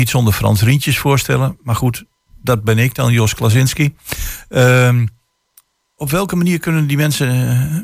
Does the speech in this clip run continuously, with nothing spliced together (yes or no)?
yes